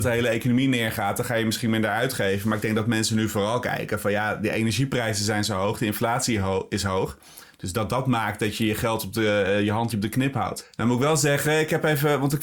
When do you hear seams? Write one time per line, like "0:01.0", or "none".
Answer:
0:09.9

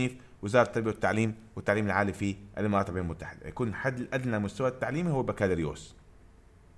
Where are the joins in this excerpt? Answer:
none

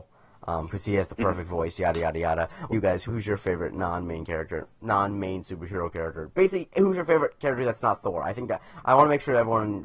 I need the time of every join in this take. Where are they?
0:02.7
0:03.1

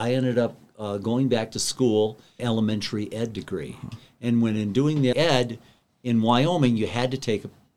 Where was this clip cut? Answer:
0:02.4
0:05.1

